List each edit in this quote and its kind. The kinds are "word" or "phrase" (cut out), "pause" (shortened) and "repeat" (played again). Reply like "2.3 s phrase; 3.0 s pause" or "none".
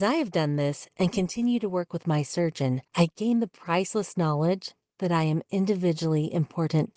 2.9 s pause